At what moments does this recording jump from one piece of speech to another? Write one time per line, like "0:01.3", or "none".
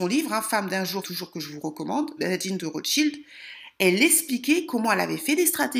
0:01.0
0:02.2